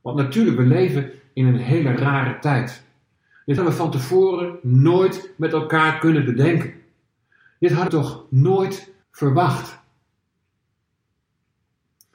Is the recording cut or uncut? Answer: cut